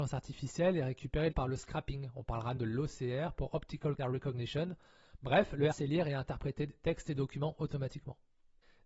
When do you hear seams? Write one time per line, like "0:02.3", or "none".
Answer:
0:01.3
0:02.6
0:04.0
0:05.7